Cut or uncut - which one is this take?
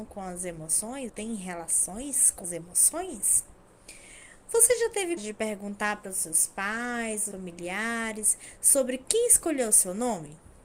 cut